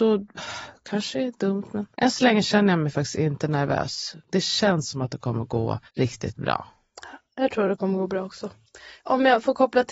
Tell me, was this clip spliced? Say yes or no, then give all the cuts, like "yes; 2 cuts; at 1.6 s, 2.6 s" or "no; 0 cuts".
yes; 2 cuts; at 1.9 s, 5.9 s